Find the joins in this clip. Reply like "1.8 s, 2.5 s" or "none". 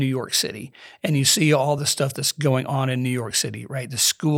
none

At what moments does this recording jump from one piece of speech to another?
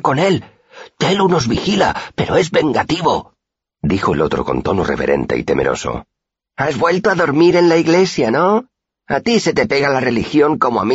none

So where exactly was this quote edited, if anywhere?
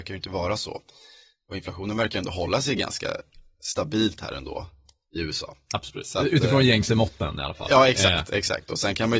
none

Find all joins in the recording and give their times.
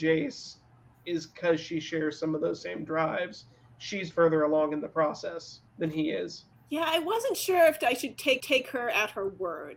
4.1 s, 5.7 s, 6.5 s, 8.4 s

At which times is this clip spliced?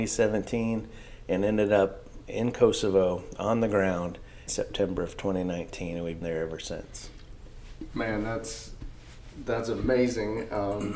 4.5 s, 6.2 s

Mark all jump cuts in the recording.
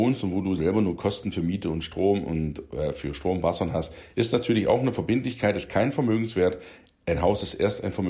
none

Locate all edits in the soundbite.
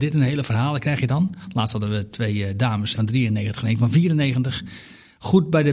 3.0 s

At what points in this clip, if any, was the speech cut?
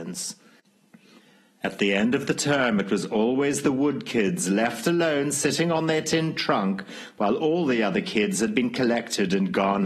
none

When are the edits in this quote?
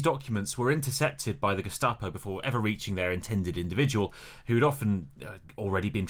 none

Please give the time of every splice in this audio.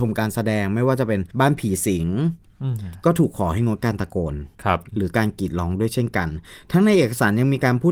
1.3 s, 4.5 s

